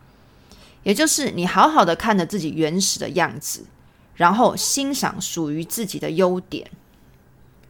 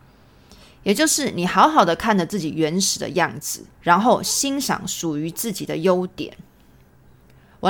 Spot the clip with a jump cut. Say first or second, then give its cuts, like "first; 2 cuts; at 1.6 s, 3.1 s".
second; 1 cut; at 3.7 s